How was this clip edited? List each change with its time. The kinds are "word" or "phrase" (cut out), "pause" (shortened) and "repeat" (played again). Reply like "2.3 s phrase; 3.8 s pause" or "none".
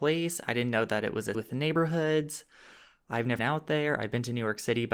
1.3 s word; 3.4 s word